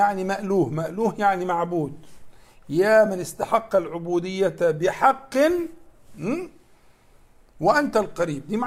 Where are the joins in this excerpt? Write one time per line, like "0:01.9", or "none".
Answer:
none